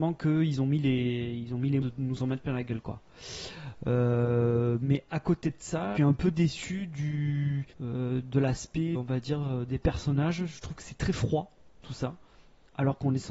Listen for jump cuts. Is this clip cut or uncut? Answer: cut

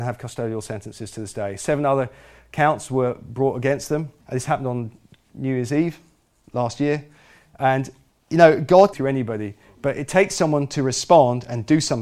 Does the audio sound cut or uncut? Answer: cut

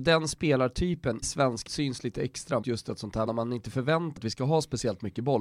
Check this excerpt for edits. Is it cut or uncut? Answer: cut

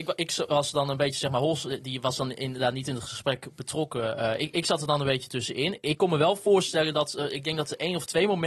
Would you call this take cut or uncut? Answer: uncut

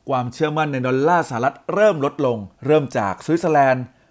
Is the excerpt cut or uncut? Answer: cut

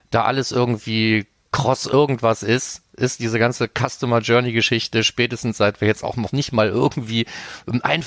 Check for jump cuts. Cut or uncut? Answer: uncut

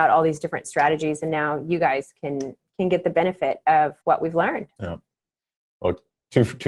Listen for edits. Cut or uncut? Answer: cut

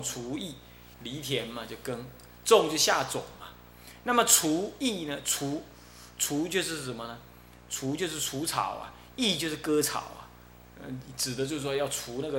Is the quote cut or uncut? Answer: cut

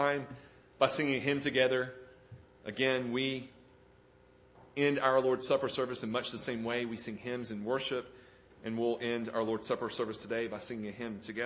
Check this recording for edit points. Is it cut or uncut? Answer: cut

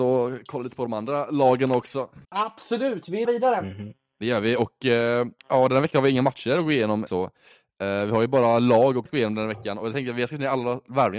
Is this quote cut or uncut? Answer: cut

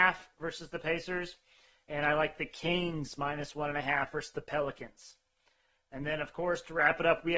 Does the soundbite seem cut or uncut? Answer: uncut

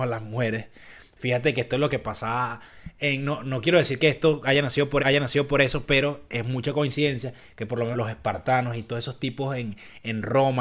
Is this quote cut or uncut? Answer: cut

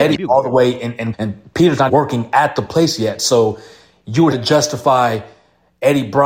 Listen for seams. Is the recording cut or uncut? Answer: cut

